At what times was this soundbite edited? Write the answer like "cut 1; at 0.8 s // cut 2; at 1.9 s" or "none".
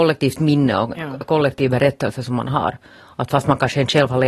cut 1; at 0.9 s